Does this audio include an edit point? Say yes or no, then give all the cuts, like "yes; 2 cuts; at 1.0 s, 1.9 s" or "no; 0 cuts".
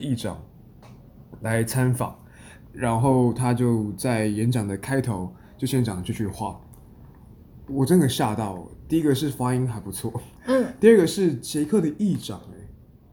yes; 1 cut; at 10.4 s